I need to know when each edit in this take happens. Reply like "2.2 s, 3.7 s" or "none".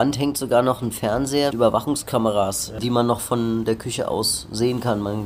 1.5 s